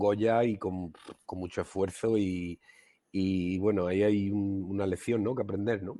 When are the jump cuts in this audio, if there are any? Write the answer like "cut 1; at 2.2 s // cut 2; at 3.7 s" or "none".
none